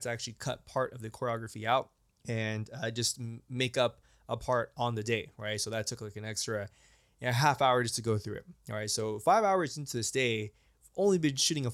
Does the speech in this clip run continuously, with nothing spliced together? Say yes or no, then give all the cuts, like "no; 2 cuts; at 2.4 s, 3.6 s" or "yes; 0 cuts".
yes; 0 cuts